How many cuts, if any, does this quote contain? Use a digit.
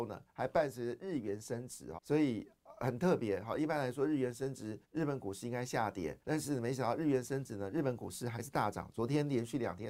3